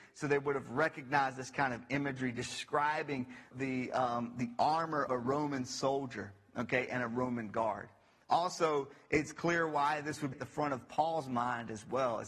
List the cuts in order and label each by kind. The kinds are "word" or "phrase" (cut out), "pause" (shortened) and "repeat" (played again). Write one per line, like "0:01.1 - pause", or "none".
0:03.5 - word
0:05.1 - word
0:10.3 - word